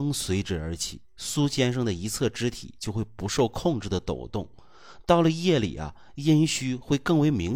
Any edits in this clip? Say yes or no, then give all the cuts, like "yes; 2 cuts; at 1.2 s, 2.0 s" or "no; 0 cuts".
no; 0 cuts